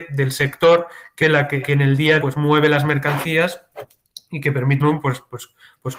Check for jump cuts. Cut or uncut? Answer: cut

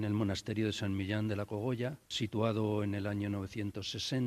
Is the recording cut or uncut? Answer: uncut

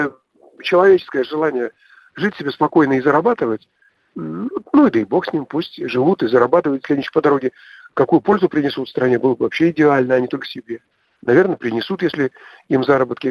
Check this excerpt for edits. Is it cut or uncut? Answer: uncut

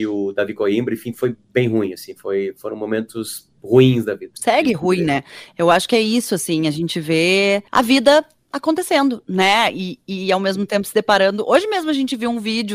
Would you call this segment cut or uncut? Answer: cut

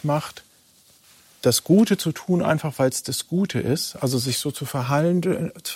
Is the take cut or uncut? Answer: uncut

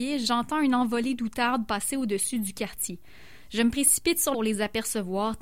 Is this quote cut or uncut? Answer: cut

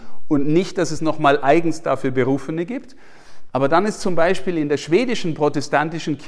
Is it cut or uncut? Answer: uncut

